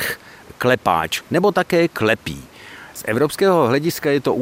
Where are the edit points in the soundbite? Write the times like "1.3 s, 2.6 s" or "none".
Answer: none